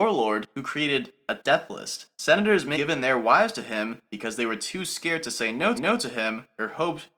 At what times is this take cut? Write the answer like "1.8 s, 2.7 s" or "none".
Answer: 2.1 s, 2.7 s, 5.7 s